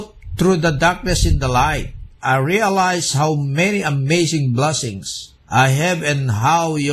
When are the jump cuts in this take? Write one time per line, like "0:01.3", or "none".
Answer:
0:05.4